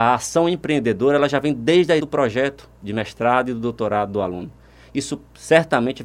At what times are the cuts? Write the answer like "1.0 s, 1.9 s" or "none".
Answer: 2.0 s